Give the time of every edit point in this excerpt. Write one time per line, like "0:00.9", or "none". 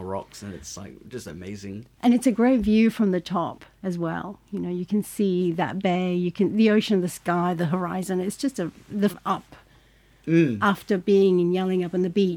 0:09.1